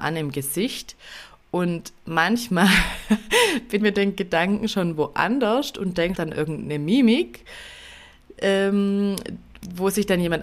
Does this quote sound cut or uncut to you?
cut